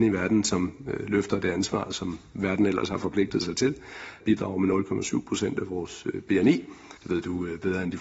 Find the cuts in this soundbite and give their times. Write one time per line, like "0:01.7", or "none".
0:04.2
0:07.0